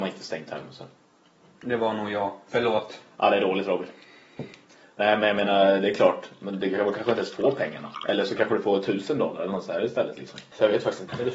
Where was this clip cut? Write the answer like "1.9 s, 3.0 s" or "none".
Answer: none